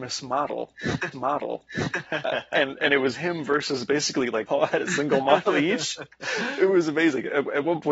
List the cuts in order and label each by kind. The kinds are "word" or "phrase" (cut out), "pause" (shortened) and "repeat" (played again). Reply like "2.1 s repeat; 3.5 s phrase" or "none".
1.1 s repeat; 4.5 s phrase